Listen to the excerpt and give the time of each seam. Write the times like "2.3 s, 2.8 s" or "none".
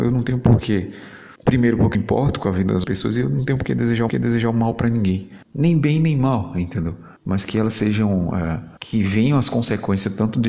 1.4 s, 1.9 s, 2.8 s, 4.1 s, 5.4 s, 7.2 s, 8.8 s